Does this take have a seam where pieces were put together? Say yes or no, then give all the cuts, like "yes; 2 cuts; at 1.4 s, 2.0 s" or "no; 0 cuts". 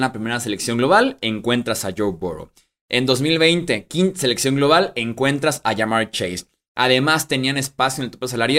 no; 0 cuts